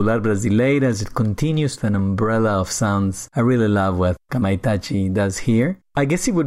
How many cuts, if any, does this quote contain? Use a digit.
1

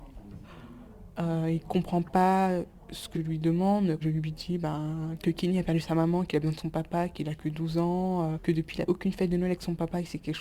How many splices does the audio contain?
5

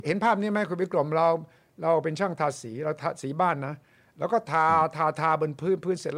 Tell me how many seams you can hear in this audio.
0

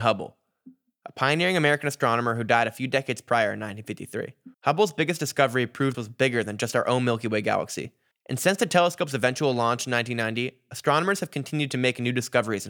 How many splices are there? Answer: 3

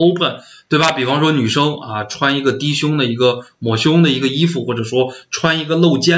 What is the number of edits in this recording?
0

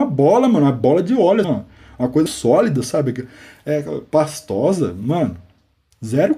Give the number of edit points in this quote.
2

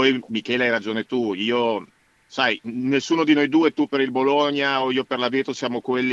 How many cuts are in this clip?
0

